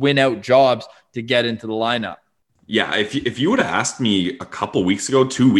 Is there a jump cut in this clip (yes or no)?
no